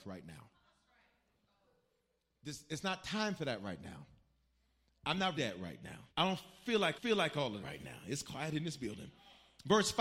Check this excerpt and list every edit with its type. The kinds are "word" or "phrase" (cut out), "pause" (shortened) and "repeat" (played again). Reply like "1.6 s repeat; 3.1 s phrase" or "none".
5.4 s phrase; 6.1 s pause; 7.0 s repeat; 7.6 s word